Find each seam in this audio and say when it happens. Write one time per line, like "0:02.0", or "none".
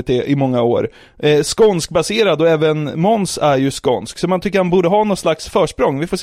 none